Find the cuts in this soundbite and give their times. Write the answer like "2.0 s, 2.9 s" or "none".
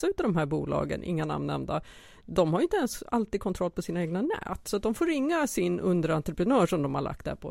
none